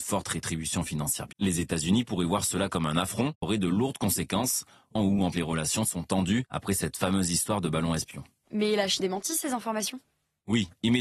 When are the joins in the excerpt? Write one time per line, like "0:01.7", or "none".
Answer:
0:01.3
0:03.4
0:05.0
0:05.3
0:05.8
0:09.0